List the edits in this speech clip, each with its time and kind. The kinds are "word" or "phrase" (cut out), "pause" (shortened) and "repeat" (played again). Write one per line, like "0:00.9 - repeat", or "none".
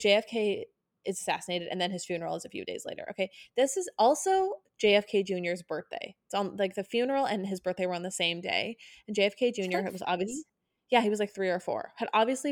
none